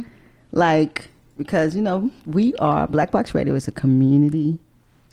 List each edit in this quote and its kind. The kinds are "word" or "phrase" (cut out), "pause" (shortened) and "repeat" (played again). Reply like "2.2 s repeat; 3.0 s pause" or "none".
none